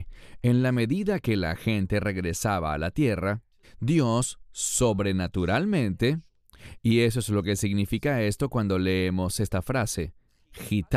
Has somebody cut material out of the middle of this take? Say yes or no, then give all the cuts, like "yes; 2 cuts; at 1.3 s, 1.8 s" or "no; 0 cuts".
yes; 1 cut; at 3.6 s